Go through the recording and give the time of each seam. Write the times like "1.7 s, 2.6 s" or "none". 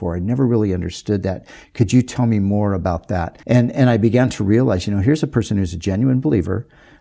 3.4 s